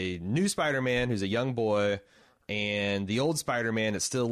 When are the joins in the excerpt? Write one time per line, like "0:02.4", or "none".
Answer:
none